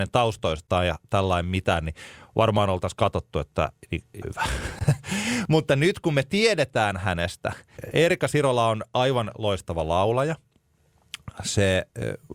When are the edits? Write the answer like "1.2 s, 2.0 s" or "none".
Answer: 4.2 s